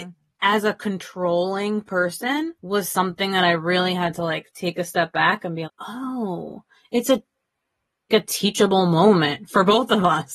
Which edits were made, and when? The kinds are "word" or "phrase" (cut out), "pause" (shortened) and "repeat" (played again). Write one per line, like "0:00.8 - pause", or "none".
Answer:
0:02.6 - pause
0:05.6 - word
0:08.1 - word